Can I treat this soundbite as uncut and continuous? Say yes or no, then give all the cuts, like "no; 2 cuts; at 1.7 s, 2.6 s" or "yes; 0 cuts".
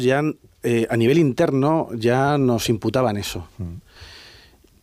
yes; 0 cuts